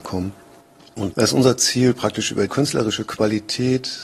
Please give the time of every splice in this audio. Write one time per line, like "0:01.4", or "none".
0:01.1
0:02.5